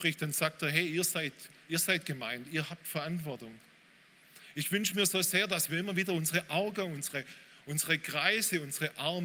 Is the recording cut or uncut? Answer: uncut